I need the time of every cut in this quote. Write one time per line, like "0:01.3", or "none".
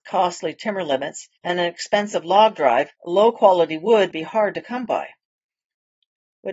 0:01.4
0:03.0
0:04.1